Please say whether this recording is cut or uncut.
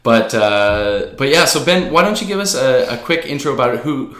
uncut